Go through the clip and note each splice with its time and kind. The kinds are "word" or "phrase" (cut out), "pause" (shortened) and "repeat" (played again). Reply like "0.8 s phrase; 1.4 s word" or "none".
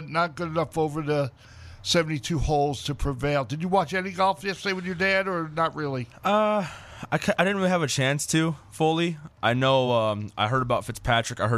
none